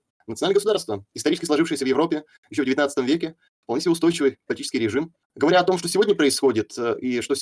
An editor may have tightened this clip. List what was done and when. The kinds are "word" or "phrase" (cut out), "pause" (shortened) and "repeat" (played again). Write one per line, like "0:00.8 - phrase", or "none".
0:05.2 - pause